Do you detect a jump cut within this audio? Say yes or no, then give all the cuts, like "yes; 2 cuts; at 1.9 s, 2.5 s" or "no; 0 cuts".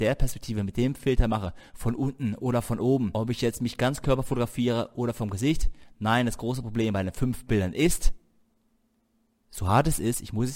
no; 0 cuts